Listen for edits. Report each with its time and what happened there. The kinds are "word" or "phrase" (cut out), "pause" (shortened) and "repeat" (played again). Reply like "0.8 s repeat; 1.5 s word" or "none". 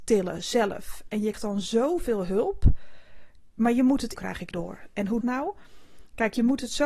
1.3 s word; 4.1 s phrase; 4.5 s word; 5.2 s phrase